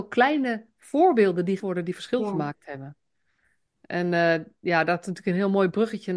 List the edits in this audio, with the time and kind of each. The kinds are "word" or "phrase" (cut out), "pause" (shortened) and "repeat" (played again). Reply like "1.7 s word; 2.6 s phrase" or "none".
1.6 s word